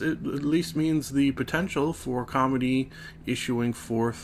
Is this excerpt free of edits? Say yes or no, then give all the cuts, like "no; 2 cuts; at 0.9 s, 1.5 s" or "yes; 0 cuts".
yes; 0 cuts